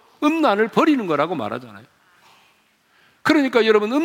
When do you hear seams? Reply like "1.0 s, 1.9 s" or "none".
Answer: none